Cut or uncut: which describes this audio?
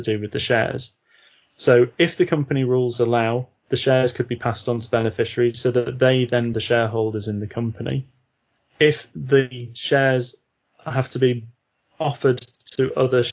cut